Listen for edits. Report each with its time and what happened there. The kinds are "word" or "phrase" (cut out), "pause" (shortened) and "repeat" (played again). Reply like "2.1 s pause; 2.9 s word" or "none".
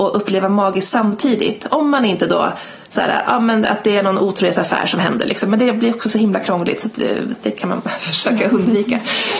none